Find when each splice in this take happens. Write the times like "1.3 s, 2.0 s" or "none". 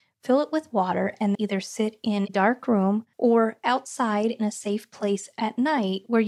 1.3 s, 3.1 s